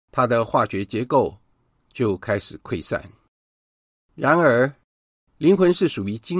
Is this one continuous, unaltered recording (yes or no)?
yes